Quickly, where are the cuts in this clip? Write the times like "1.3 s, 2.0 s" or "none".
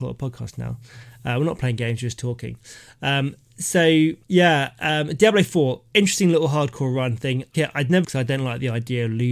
4.2 s, 7.5 s, 8.0 s